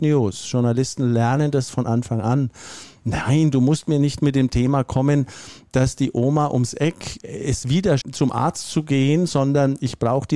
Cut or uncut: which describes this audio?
cut